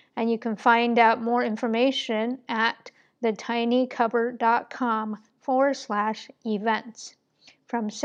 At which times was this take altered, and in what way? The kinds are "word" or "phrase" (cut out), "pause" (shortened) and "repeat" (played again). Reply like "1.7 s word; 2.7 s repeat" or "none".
none

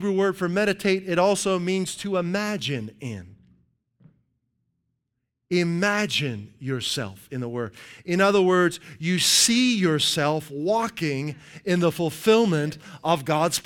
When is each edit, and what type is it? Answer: none

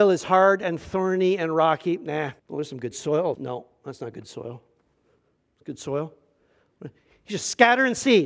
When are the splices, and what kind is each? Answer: 2.4 s pause; 2.9 s phrase; 3.3 s word

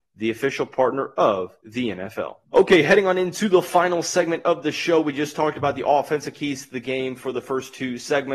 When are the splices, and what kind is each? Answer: 1.6 s pause; 2.4 s pause

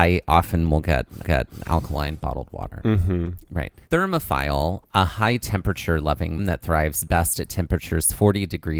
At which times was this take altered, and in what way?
1.2 s repeat; 6.4 s word

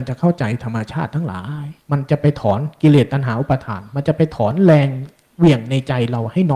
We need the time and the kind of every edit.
1.8 s pause

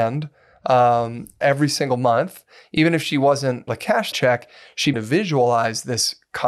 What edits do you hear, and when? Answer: 1.4 s word; 3.7 s word; 4.1 s word; 4.9 s word

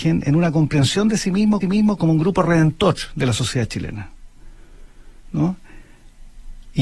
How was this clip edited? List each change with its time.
1.6 s repeat

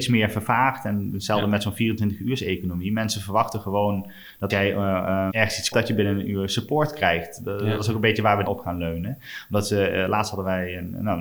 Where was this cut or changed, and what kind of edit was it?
4.5 s word; 5.3 s word; 5.7 s word; 8.5 s word

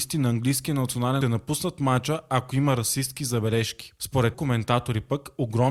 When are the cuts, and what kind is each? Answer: 1.2 s phrase; 4.3 s word

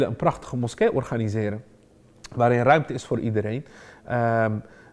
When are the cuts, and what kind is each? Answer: none

